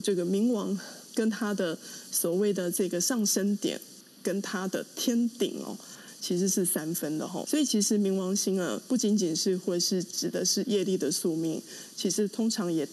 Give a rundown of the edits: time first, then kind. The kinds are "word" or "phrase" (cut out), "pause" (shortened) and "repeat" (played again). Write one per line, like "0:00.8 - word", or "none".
0:07.4 - word

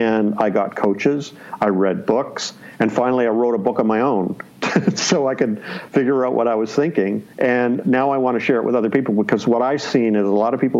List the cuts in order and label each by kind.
0:07.3 - pause

